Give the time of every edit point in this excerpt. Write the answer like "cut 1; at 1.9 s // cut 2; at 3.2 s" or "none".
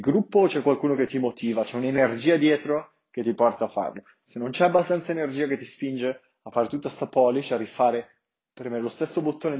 none